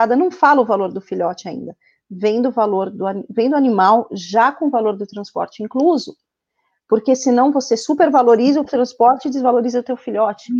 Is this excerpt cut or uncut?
uncut